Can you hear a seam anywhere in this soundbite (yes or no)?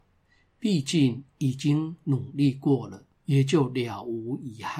yes